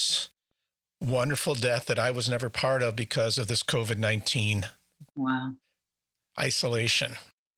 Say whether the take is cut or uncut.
cut